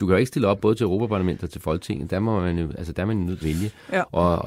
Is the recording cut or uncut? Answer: cut